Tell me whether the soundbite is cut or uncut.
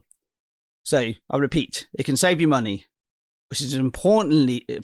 uncut